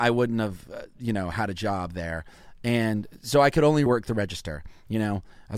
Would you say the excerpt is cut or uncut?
cut